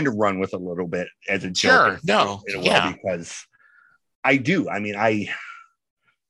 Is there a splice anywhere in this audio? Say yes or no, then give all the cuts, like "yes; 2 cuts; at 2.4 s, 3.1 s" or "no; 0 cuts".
no; 0 cuts